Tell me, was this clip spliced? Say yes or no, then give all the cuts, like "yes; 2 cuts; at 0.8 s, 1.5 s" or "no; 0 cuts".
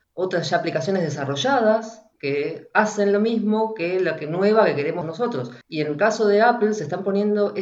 yes; 3 cuts; at 2.1 s, 5.0 s, 5.6 s